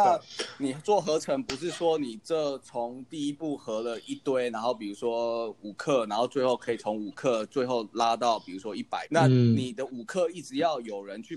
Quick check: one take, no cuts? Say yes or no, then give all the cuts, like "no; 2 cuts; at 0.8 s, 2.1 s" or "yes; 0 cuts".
no; 1 cut; at 9.1 s